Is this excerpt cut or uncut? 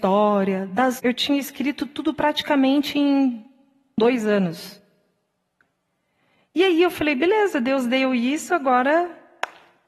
cut